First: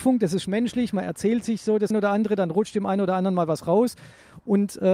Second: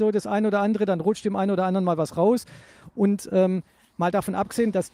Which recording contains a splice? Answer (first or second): first